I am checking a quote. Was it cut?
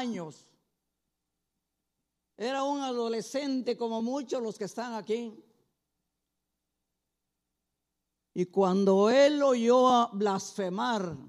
no; 0 cuts

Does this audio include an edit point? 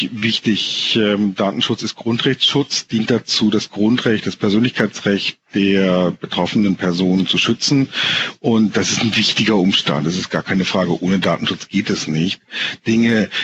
no; 0 cuts

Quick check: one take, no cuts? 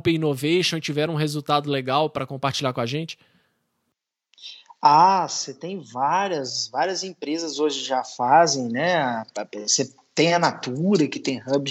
yes; 0 cuts

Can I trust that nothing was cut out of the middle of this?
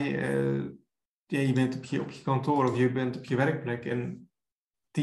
yes; 0 cuts

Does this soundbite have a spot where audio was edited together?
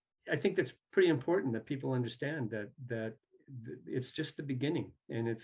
no; 0 cuts

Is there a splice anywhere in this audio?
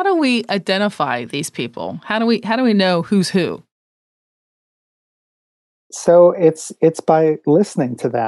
no; 0 cuts

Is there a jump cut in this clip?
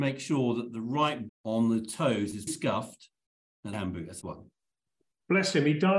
yes; 4 cuts; at 1.3 s, 2.5 s, 3.7 s, 4.2 s

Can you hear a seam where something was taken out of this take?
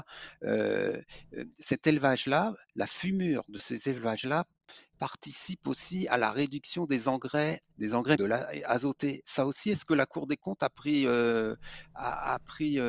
yes; 3 cuts; at 4.9 s, 7.7 s, 8.2 s

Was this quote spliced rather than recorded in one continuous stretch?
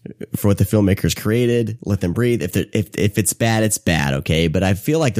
no; 0 cuts

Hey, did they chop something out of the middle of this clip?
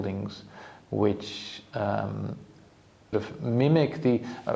yes; 1 cut; at 3.1 s

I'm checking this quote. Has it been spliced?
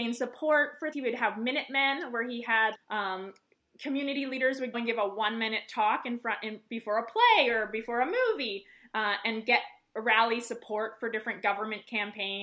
yes; 3 cuts; at 0.9 s, 2.7 s, 4.7 s

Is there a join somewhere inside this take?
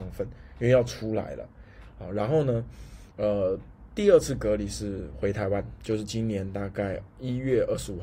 no; 0 cuts

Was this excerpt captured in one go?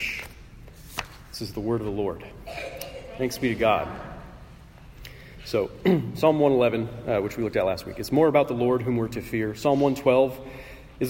yes; 0 cuts

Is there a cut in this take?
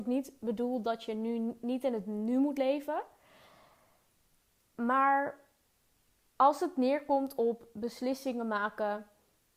no; 0 cuts

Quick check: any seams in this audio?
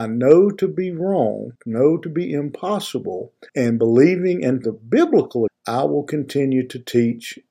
yes; 4 cuts; at 1.6 s, 3.5 s, 4.6 s, 5.5 s

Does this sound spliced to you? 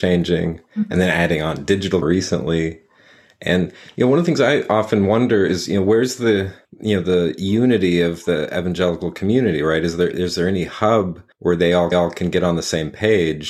yes; 4 cuts; at 2.0 s, 6.6 s, 11.3 s, 11.9 s

